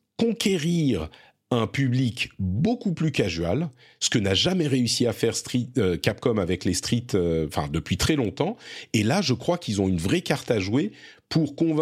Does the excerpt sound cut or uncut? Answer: uncut